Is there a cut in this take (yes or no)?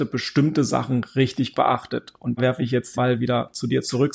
yes